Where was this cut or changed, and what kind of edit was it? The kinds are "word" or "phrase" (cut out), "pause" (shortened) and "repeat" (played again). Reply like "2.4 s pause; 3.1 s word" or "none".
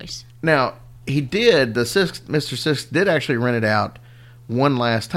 none